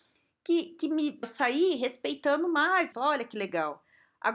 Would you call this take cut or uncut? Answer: cut